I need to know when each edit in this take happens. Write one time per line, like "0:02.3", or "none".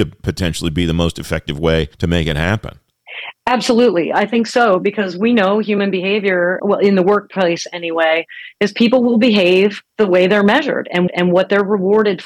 0:01.9
0:03.4
0:06.6
0:09.9
0:11.1